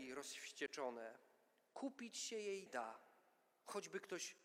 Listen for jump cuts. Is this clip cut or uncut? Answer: cut